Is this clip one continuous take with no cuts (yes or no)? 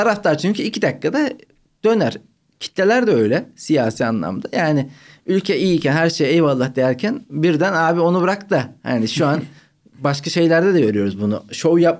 yes